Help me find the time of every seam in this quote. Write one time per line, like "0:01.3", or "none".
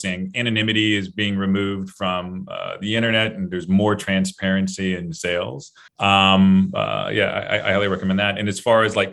0:05.9